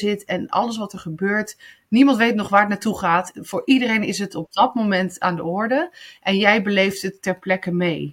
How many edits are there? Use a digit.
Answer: 0